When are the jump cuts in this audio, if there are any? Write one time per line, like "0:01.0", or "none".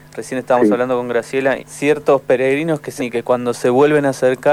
0:01.6
0:03.0